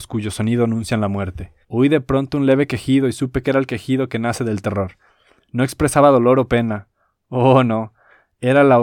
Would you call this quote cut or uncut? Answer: cut